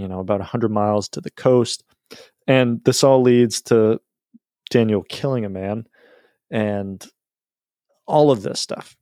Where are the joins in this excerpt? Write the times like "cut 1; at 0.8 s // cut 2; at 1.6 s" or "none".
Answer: none